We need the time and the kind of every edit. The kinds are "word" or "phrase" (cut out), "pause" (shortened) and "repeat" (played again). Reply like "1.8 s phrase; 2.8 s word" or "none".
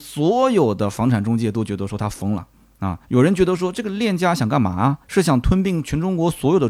3.0 s pause; 5.0 s pause